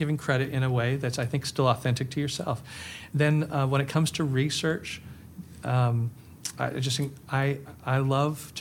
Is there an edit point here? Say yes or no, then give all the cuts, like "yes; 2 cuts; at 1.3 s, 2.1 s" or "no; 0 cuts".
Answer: yes; 1 cut; at 3.1 s